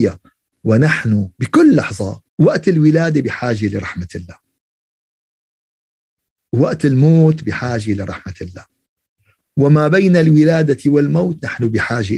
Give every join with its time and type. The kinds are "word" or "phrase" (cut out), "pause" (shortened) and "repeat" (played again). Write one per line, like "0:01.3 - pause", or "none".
0:01.3 - pause
0:02.3 - pause